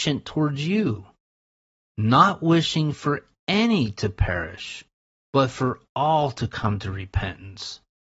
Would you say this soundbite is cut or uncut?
uncut